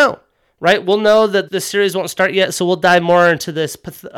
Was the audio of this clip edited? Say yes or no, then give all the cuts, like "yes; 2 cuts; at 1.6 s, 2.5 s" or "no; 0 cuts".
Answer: yes; 1 cut; at 1.5 s